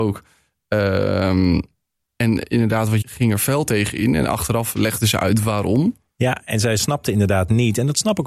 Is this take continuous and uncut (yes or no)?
no